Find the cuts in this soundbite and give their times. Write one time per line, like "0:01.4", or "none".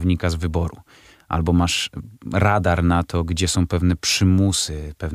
none